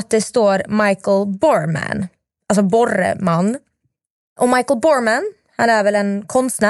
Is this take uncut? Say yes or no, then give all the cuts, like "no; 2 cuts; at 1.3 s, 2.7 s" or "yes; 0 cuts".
yes; 0 cuts